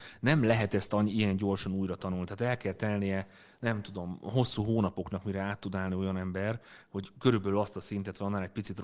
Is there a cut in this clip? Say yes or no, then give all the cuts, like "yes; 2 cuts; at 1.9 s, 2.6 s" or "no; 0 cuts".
no; 0 cuts